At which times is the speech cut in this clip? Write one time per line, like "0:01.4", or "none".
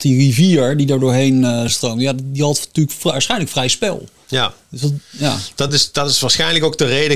none